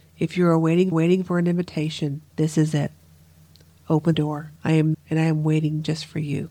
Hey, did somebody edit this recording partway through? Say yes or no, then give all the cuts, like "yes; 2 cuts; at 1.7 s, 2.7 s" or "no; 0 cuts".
yes; 5 cuts; at 0.9 s, 2.3 s, 4.1 s, 4.6 s, 4.9 s